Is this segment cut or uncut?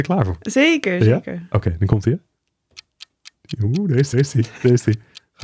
cut